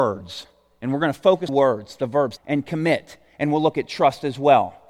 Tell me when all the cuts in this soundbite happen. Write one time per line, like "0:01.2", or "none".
0:01.5
0:02.4